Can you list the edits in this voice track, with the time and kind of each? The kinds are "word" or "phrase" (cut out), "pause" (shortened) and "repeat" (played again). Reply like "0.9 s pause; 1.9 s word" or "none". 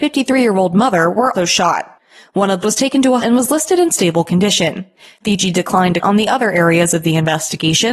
1.3 s word; 2.6 s word; 3.2 s word; 6.0 s word